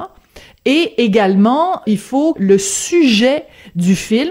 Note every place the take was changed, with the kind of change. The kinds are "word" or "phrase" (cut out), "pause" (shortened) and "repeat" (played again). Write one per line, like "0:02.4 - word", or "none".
0:01.8 - word
0:02.3 - word